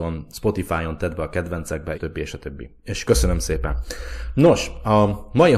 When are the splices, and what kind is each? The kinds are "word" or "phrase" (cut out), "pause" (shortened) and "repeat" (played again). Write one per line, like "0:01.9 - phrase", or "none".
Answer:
0:01.9 - word

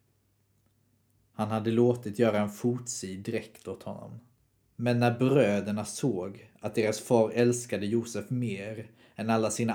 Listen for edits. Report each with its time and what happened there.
none

